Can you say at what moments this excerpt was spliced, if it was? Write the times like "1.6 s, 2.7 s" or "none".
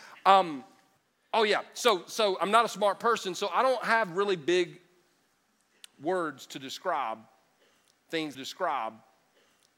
1.0 s, 8.3 s